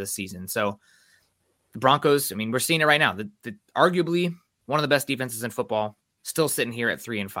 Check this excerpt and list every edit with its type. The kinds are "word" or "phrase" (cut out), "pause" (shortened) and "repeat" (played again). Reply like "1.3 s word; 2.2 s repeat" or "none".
none

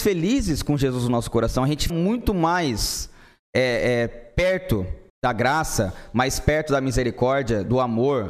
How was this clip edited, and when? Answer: 1.9 s word; 5.1 s pause

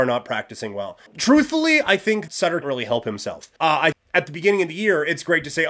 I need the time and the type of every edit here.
1.1 s pause; 2.3 s word; 2.6 s word; 3.6 s pause; 3.9 s word

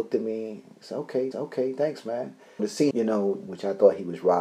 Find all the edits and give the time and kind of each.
1.3 s repeat; 2.6 s word; 2.9 s phrase; 3.5 s phrase

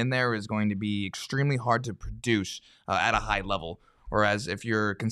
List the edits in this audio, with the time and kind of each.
none

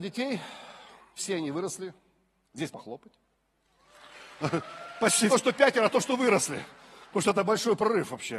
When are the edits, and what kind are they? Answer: 1.2 s word; 2.7 s word; 5.3 s phrase

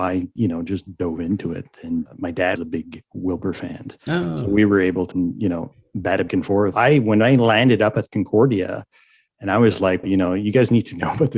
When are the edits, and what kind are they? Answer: 2.1 s word; 2.6 s word; 5.1 s word; 6.3 s word; 6.7 s word; 10.0 s word

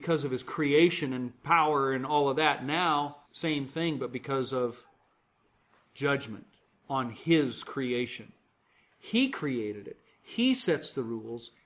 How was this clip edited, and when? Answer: 3.3 s word; 6.7 s pause

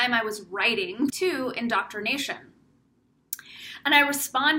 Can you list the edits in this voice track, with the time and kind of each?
1.1 s word

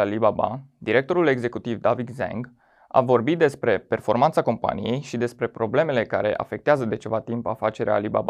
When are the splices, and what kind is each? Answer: none

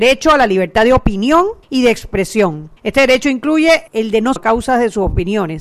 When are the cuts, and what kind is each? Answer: 1.6 s pause; 2.8 s pause; 3.9 s pause; 4.4 s phrase

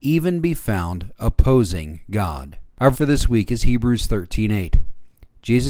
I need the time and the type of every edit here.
2.9 s word

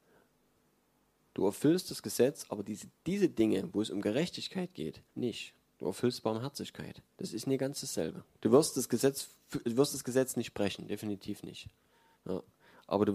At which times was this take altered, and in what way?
5.1 s pause; 7.1 s pause; 8.3 s pause

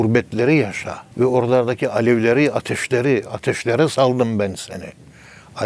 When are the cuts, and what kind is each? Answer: 1.1 s pause

